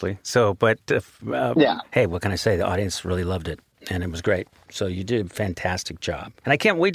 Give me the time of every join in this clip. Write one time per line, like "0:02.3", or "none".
none